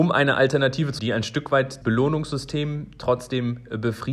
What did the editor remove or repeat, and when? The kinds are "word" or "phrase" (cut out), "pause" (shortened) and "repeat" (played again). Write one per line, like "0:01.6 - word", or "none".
0:01.0 - word
0:01.8 - word